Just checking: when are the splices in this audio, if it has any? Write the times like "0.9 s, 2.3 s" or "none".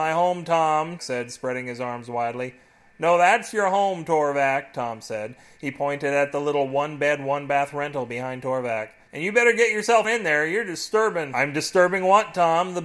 1.0 s, 10.0 s